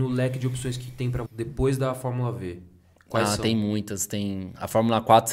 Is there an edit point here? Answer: yes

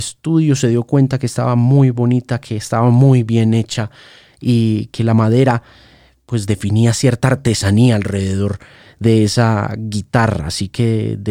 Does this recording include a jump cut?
no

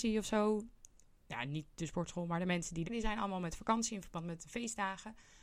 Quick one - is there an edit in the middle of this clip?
yes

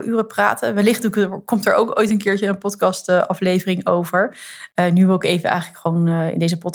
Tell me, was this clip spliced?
no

